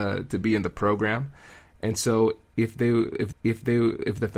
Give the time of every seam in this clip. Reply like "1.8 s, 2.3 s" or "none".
3.3 s